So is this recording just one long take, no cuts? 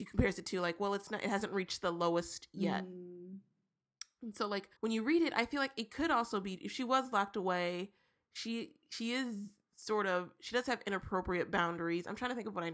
no; 2 cuts; at 4.8 s, 8.8 s

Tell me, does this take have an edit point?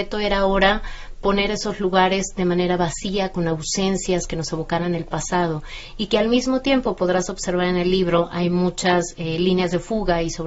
no; 0 cuts

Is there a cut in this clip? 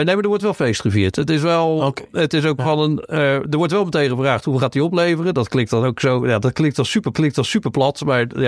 yes; 1 cut; at 7.1 s

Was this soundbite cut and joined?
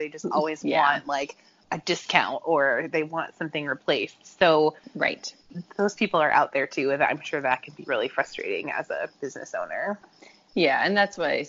no; 0 cuts

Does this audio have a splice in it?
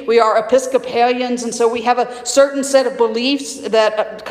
no; 0 cuts

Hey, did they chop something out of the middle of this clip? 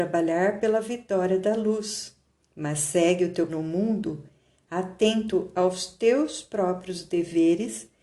yes; 2 cuts; at 2.4 s, 3.5 s

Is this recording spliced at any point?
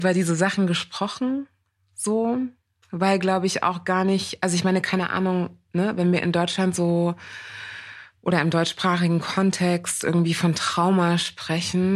no; 0 cuts

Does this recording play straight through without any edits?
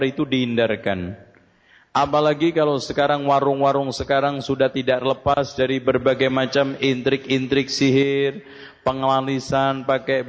yes; 0 cuts

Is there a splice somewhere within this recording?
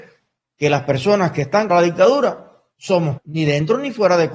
yes; 2 cuts; at 1.7 s, 3.2 s

